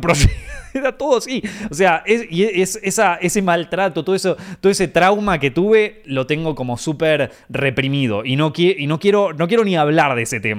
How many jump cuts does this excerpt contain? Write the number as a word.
zero